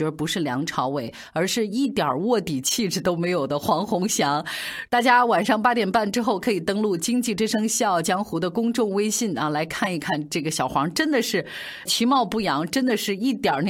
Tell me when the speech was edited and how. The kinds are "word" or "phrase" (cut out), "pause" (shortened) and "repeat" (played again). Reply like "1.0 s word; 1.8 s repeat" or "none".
11.9 s word